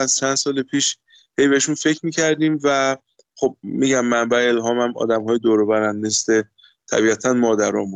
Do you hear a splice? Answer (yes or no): no